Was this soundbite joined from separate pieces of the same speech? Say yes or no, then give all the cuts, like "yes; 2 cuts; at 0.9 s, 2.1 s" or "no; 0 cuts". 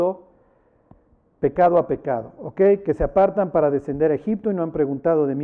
no; 0 cuts